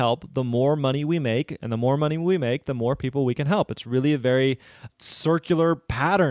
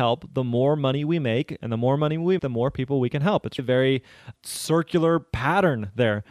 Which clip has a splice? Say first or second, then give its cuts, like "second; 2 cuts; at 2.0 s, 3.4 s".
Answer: second; 2 cuts; at 2.4 s, 3.6 s